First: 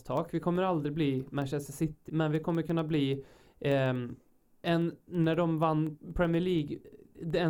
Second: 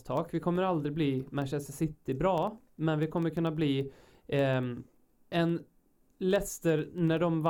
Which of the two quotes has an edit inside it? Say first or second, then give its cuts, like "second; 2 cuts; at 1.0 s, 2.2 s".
first; 2 cuts; at 2.1 s, 5.1 s